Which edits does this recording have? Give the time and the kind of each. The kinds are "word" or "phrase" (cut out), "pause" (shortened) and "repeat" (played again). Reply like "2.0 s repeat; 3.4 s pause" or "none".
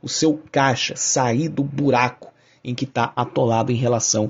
none